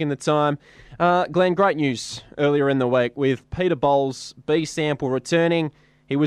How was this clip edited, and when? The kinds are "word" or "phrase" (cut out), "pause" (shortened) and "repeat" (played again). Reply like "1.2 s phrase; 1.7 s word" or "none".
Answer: none

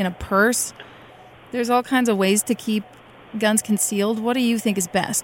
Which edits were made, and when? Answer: none

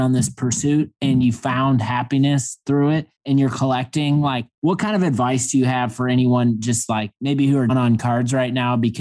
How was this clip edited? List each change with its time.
3.2 s pause; 4.5 s pause; 7.2 s pause; 7.7 s word

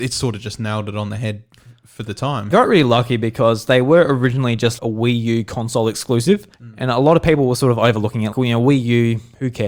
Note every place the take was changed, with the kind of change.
2.5 s phrase; 4.8 s word; 6.5 s pause; 8.3 s word

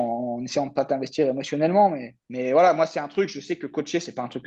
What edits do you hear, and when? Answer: 2.2 s pause

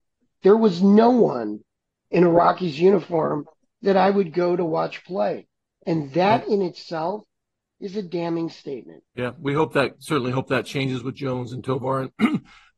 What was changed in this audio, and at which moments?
none

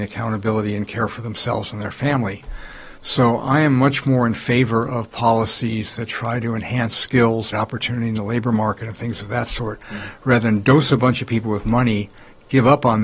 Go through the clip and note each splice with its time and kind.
7.5 s word

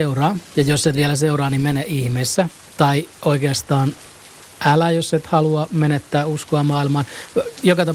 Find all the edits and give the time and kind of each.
none

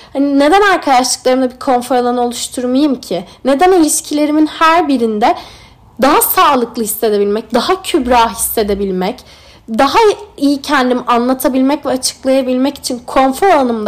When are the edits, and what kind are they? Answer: none

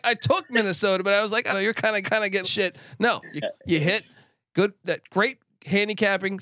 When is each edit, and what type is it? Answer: 1.5 s word; 2.0 s repeat; 2.4 s phrase; 3.4 s phrase

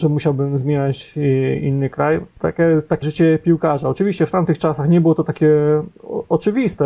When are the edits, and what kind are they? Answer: 3.0 s word

